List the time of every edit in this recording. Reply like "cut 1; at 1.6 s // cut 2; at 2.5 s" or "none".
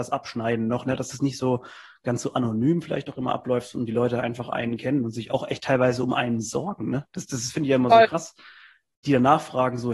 none

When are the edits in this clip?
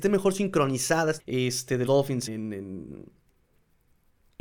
cut 1; at 1.2 s // cut 2; at 1.9 s // cut 3; at 2.3 s

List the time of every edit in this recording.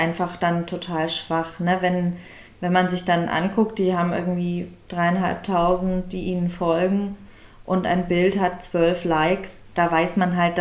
none

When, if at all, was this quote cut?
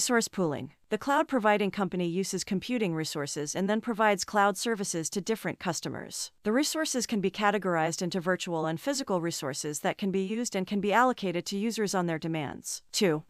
none

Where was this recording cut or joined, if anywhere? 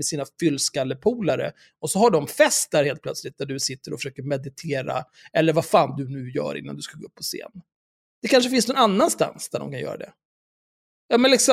none

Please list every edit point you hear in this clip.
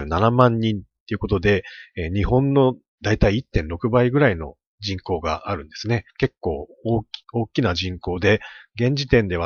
cut 1; at 6.1 s // cut 2; at 7.2 s

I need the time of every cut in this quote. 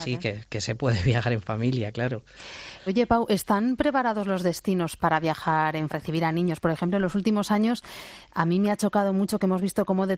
cut 1; at 2.9 s // cut 2; at 5.0 s // cut 3; at 5.9 s

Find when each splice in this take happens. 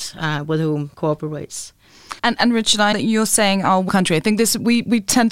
cut 1; at 0.9 s // cut 2; at 2.2 s // cut 3; at 2.9 s // cut 4; at 3.9 s

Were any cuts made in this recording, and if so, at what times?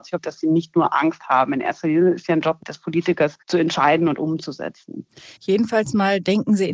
cut 1; at 3.4 s // cut 2; at 5.4 s

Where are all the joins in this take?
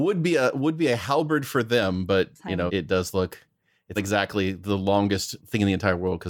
cut 1; at 2.7 s // cut 2; at 4.0 s // cut 3; at 5.4 s

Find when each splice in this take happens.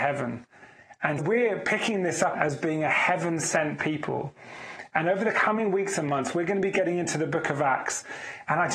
cut 1; at 1.2 s // cut 2; at 2.3 s

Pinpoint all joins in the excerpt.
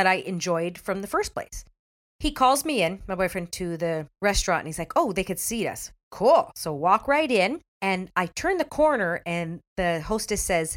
cut 1; at 2.0 s // cut 2; at 4.2 s // cut 3; at 7.7 s

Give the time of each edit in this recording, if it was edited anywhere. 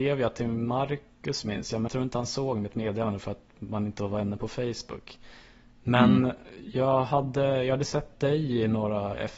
cut 1; at 1.9 s

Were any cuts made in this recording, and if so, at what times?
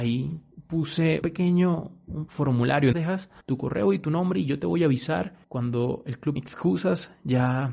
cut 1; at 1.2 s // cut 2; at 2.3 s // cut 3; at 2.9 s // cut 4; at 3.4 s // cut 5; at 5.4 s // cut 6; at 6.4 s

